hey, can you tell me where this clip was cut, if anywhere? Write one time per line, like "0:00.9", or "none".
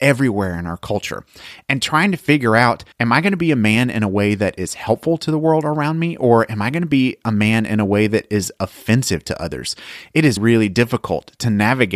0:02.9
0:10.4